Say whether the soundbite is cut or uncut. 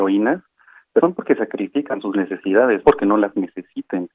cut